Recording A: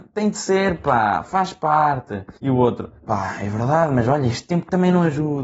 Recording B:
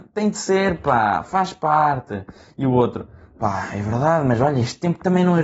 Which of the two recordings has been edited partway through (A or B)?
A